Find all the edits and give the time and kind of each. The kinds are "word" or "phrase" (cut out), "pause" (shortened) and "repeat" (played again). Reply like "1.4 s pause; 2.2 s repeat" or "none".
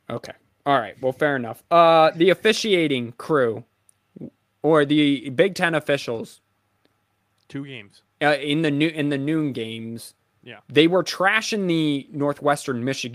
8.1 s pause